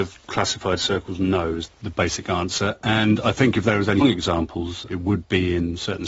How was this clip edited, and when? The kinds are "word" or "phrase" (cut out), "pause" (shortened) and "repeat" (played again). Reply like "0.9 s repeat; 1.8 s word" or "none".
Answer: 1.7 s word; 4.0 s word; 4.9 s word